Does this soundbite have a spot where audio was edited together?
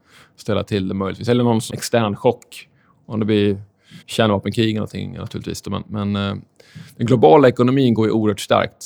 yes; 2 cuts; at 1.7 s, 4.0 s

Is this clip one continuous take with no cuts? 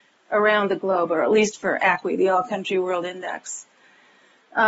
yes; 0 cuts

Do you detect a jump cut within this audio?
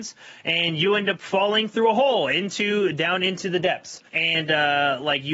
yes; 1 cut; at 4.1 s

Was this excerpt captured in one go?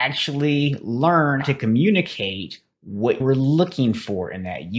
no; 2 cuts; at 1.4 s, 3.2 s

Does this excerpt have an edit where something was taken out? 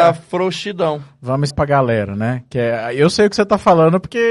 yes; 1 cut; at 1.5 s

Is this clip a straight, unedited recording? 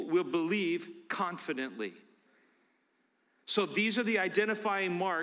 yes; 0 cuts

